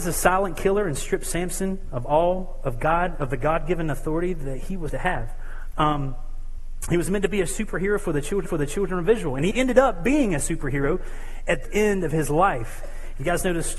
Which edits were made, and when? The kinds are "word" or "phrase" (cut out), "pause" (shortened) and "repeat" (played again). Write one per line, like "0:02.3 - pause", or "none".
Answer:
0:04.9 - word
0:08.5 - repeat
0:09.5 - word
0:11.6 - word